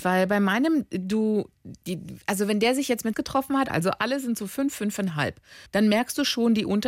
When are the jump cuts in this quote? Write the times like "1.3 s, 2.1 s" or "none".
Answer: 3.1 s, 3.7 s, 5.7 s

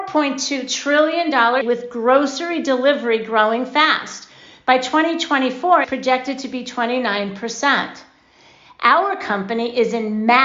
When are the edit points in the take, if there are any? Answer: 1.6 s, 5.8 s

